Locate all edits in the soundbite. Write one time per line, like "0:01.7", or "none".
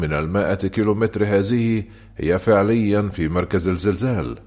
none